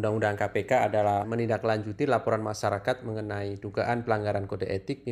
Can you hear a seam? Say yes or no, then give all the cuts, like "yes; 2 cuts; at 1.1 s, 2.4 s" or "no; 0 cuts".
yes; 1 cut; at 1.2 s